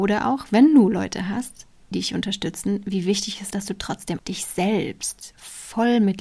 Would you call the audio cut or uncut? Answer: cut